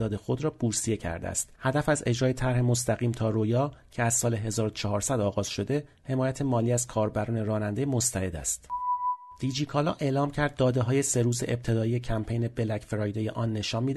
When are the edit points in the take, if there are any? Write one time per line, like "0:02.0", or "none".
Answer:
0:01.5